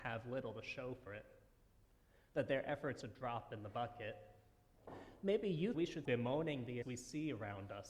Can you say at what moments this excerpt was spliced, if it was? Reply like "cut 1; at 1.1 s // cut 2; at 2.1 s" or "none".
cut 1; at 1.1 s // cut 2; at 3.0 s // cut 3; at 5.7 s // cut 4; at 6.0 s // cut 5; at 6.8 s